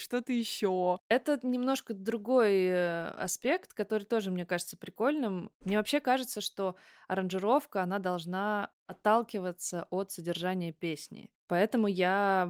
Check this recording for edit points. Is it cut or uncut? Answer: uncut